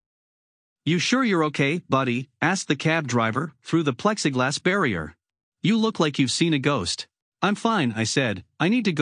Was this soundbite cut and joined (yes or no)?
yes